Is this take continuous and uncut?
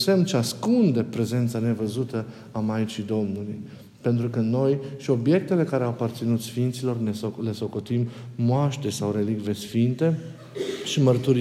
yes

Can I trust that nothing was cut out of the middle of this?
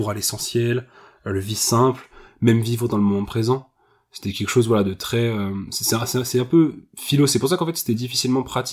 yes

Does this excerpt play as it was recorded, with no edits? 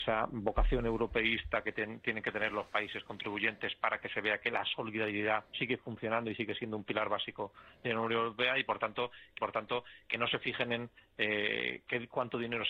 no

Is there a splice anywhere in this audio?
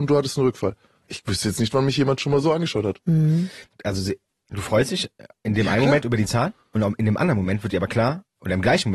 no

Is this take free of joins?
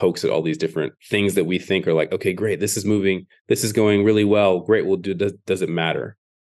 no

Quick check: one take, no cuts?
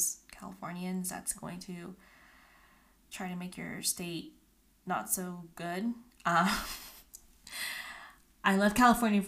yes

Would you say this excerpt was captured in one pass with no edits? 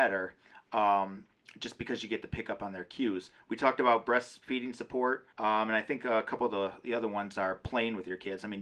no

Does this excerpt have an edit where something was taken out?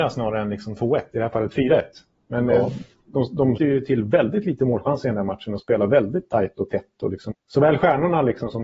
yes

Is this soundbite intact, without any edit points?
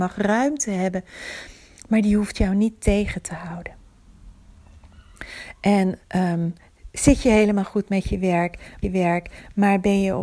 no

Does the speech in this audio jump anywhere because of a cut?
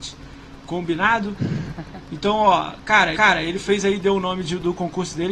yes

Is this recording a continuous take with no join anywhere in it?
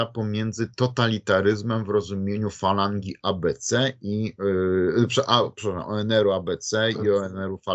yes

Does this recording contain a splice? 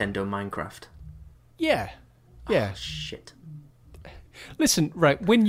yes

